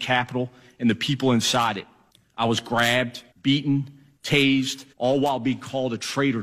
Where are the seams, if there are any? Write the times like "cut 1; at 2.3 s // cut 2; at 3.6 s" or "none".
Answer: cut 1; at 2.1 s // cut 2; at 3.3 s // cut 3; at 4.9 s